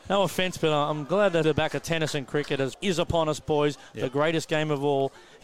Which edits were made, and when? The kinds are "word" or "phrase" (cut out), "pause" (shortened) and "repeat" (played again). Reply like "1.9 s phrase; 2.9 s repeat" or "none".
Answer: 1.4 s word; 2.7 s phrase